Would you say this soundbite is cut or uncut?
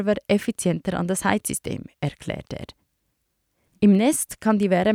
uncut